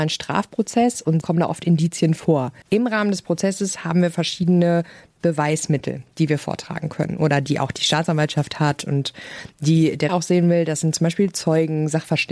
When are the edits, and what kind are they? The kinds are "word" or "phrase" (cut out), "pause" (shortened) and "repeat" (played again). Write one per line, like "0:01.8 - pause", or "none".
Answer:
0:01.2 - word
0:02.6 - pause
0:10.1 - word